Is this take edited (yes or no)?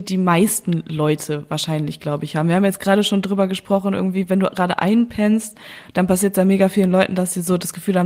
no